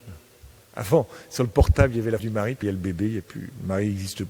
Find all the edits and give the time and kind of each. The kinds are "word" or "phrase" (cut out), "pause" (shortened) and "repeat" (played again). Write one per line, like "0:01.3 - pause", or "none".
0:02.2 - word
0:02.6 - word